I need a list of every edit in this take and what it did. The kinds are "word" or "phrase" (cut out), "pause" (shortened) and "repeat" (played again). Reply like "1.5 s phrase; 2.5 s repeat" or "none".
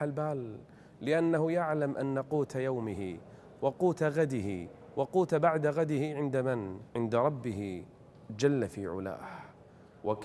6.9 s pause